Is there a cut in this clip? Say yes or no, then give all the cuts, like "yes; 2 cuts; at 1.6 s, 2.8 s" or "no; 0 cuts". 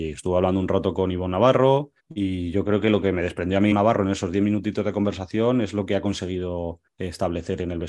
yes; 3 cuts; at 2.0 s, 3.7 s, 6.9 s